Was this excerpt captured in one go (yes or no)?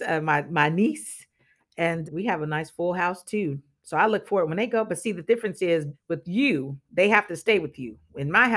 no